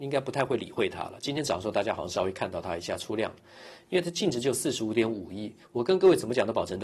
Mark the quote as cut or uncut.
cut